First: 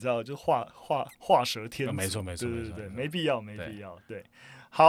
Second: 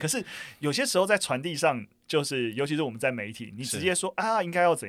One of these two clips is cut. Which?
first; 1 cut; at 1.1 s

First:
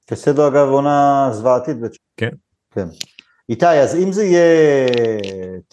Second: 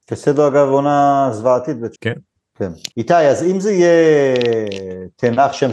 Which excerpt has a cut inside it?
second; 2 cuts; at 2.0 s, 2.9 s

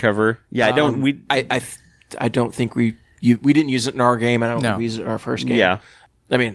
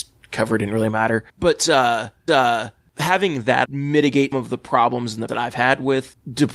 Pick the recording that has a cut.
second; 5 cuts; at 1.3 s, 2.3 s, 3.6 s, 4.3 s, 5.3 s

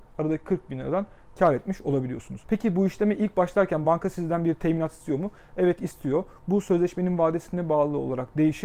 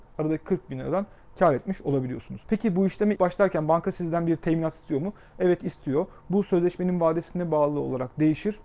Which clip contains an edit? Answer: second; 1 cut; at 3.2 s

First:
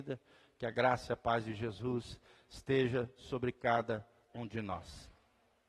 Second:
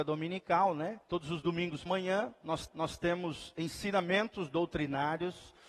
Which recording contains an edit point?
second; 3 cuts; at 1.0 s, 1.9 s, 2.7 s

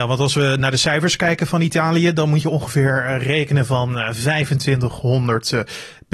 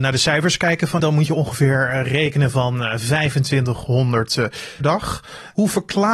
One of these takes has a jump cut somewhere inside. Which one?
second; 2 cuts; at 1.0 s, 4.8 s

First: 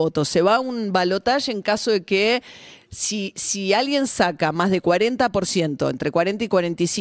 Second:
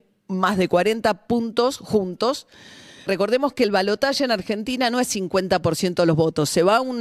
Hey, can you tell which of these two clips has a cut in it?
second; 1 cut; at 3.1 s

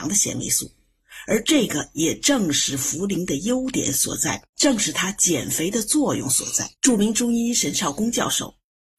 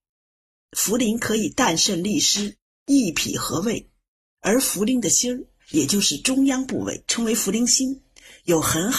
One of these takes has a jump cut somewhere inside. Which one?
first; 2 cuts; at 4.5 s, 6.7 s

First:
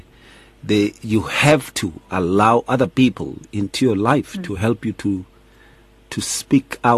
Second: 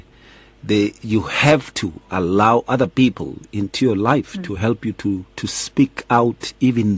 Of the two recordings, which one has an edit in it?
second; 1 cut; at 5.3 s

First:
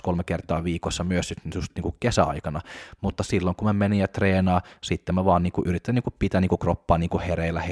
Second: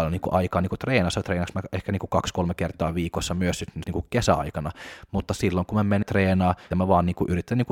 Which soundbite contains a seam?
second; 3 cuts; at 3.8 s, 6.0 s, 6.7 s

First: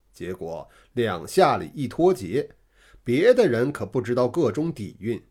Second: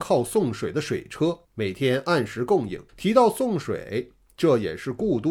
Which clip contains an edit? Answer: second; 2 cuts; at 1.4 s, 2.9 s

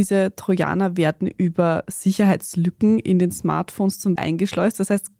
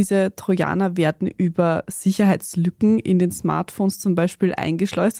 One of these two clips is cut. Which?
first; 1 cut; at 4.2 s

